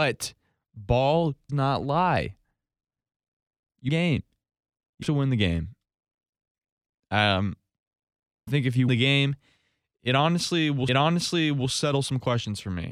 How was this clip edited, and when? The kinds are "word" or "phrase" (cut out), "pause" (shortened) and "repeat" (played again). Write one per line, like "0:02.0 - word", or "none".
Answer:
0:01.5 - word
0:03.9 - phrase
0:05.0 - word
0:08.5 - word
0:08.9 - word
0:10.9 - repeat